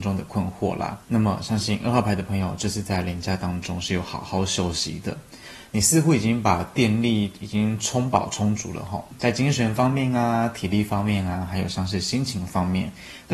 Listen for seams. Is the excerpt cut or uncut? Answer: cut